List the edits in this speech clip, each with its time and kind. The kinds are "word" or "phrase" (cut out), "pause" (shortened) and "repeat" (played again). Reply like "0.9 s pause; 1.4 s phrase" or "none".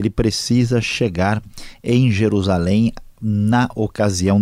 none

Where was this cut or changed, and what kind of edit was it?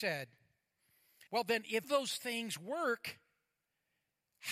1.3 s pause; 1.8 s phrase

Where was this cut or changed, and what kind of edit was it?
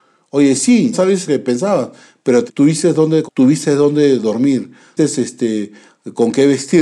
0.9 s word; 1.3 s word; 2.5 s word; 3.2 s word; 5.0 s word

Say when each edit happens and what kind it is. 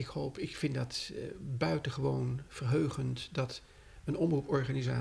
none

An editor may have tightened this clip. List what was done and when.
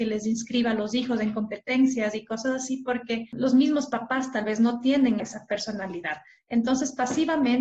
5.2 s word

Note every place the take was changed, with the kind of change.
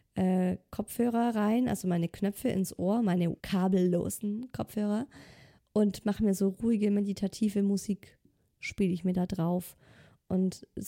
3.4 s pause

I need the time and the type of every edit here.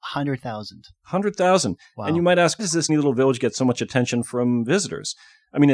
2.6 s word; 2.9 s word

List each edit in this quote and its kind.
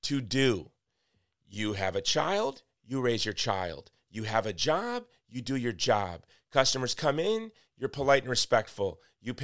none

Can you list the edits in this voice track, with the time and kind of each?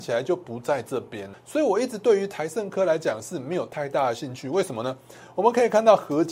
1.3 s word

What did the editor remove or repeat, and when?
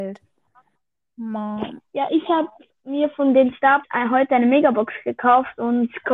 3.8 s word

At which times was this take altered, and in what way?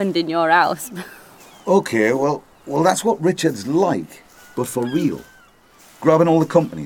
none

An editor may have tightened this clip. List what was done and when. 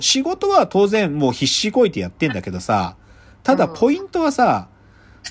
none

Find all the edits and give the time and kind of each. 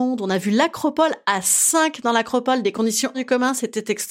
3.1 s word

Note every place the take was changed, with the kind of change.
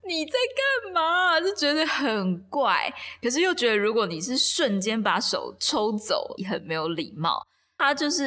6.4 s phrase

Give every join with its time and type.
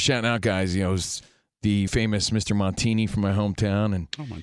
1.9 s word

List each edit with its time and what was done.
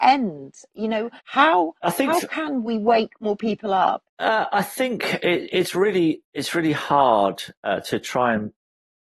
1.2 s pause; 4.1 s pause; 6.3 s pause

